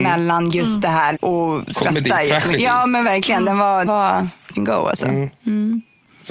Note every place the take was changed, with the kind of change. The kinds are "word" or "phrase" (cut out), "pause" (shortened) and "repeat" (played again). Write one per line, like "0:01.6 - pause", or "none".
0:01.1 - phrase
0:03.9 - word
0:04.5 - word